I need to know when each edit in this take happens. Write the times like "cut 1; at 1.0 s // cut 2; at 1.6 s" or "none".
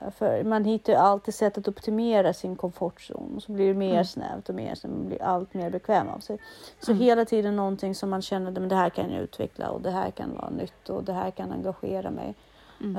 none

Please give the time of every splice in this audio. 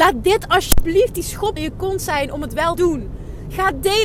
cut 1; at 1.6 s // cut 2; at 2.8 s

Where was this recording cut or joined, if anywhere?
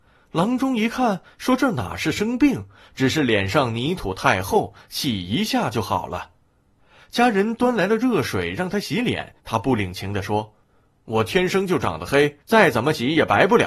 cut 1; at 9.4 s // cut 2; at 10.6 s // cut 3; at 12.4 s

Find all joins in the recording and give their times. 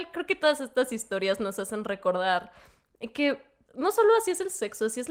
cut 1; at 3.7 s

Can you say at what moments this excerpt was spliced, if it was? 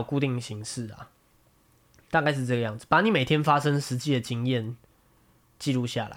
none

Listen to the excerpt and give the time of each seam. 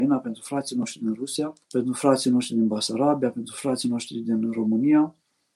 cut 1; at 1.6 s

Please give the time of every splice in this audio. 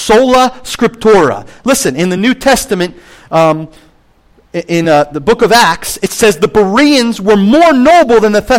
none

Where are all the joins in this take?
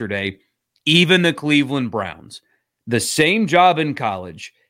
none

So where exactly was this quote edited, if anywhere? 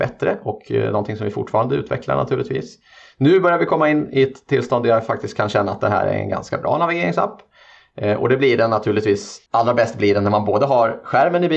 cut 1; at 9.5 s

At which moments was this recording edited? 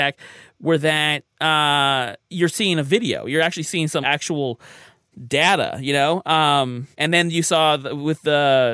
cut 1; at 2.2 s // cut 2; at 4.0 s // cut 3; at 6.9 s

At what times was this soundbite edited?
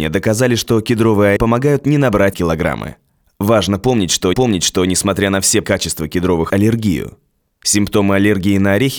cut 1; at 1.4 s // cut 2; at 2.3 s // cut 3; at 4.3 s // cut 4; at 5.6 s // cut 5; at 6.5 s

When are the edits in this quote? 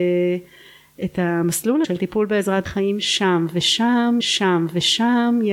cut 1; at 1.8 s // cut 2; at 2.7 s // cut 3; at 4.2 s

